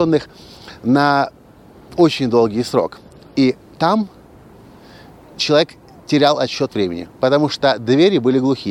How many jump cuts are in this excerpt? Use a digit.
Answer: 0